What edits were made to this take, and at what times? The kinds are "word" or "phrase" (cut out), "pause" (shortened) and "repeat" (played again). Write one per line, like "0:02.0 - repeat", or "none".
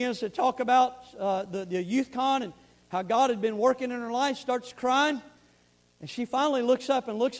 none